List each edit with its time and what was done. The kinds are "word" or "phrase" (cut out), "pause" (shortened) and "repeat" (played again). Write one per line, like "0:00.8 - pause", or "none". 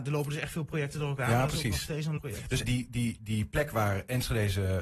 0:02.2 - word
0:02.6 - word